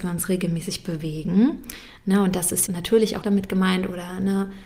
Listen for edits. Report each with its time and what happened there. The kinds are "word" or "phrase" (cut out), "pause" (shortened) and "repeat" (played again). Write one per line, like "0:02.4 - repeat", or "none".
0:02.7 - word
0:03.2 - word